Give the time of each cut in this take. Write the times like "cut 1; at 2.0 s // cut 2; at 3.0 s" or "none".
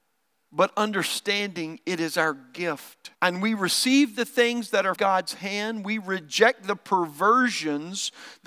cut 1; at 3.1 s // cut 2; at 5.0 s

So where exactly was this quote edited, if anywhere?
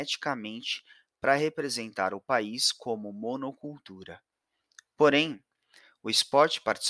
none

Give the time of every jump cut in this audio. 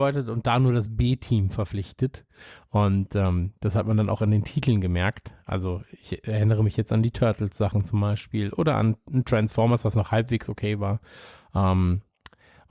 none

